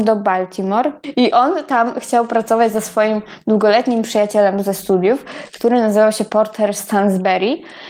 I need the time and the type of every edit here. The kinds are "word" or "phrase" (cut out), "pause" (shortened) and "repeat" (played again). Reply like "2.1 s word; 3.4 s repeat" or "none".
none